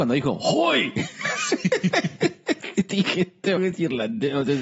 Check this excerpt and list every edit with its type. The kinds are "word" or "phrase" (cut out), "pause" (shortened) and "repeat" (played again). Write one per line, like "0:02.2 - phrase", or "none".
0:03.6 - word